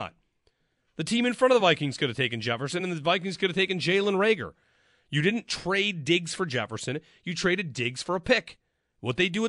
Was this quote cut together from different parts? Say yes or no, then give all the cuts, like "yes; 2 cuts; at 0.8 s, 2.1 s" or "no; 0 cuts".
no; 0 cuts